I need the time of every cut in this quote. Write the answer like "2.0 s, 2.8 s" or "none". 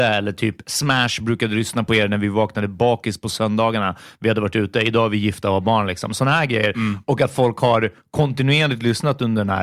none